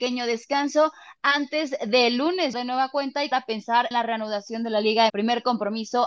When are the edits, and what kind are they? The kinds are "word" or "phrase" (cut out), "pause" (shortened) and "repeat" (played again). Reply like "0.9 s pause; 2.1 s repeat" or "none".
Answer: 2.5 s phrase; 3.3 s word; 3.9 s word; 5.1 s word